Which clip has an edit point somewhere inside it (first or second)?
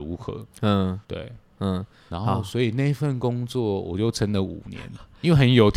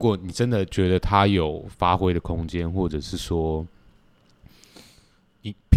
first